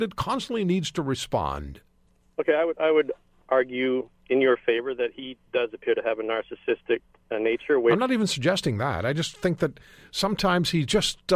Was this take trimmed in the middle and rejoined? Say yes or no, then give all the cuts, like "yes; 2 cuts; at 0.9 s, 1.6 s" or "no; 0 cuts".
no; 0 cuts